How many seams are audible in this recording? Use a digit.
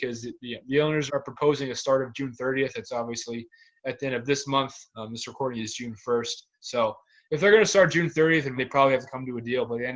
2